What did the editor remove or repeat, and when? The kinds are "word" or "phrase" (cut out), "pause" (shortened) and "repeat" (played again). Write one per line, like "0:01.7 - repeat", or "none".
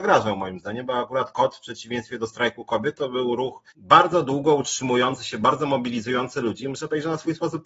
0:03.7 - pause